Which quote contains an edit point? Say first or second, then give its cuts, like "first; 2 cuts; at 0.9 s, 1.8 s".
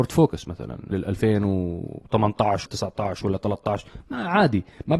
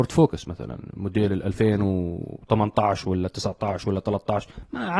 first; 2 cuts; at 0.9 s, 2.7 s